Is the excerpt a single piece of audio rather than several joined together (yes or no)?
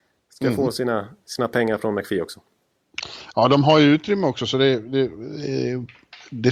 yes